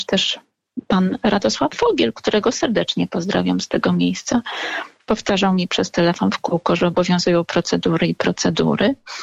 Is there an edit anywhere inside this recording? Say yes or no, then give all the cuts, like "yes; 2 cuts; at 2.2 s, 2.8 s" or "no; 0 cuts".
no; 0 cuts